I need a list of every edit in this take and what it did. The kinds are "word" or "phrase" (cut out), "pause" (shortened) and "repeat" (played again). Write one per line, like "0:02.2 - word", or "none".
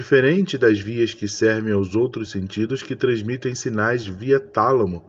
none